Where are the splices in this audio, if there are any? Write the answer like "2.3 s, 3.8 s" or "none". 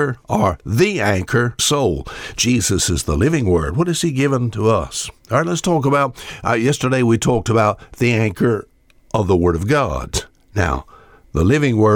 1.6 s